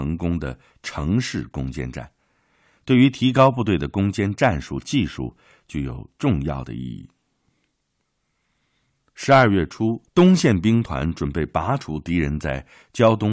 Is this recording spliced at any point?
yes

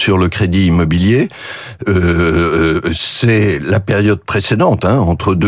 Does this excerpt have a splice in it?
no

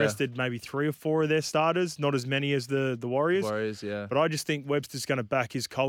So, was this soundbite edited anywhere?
no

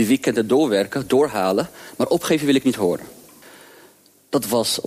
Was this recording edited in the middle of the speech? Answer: no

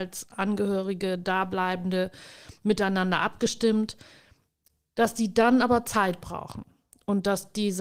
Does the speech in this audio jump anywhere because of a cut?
no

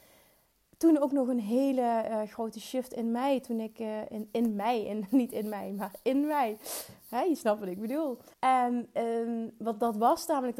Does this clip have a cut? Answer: yes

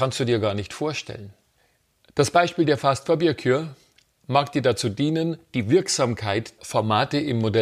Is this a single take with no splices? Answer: no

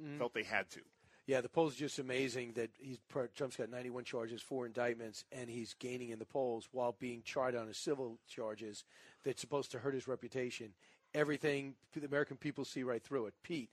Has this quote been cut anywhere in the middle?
no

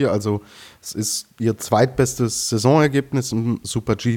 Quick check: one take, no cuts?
yes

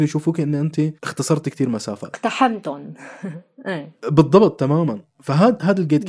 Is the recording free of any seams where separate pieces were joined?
no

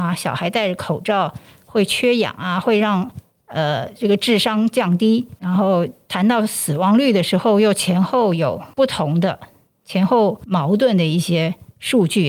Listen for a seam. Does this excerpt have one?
no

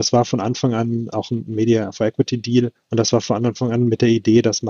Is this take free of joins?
no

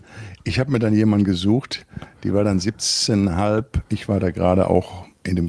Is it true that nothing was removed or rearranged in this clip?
yes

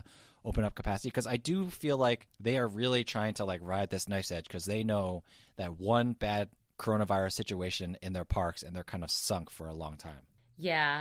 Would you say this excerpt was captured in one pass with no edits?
yes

